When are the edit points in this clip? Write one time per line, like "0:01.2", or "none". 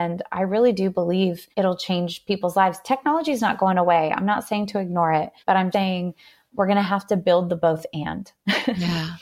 0:01.5
0:05.4
0:05.7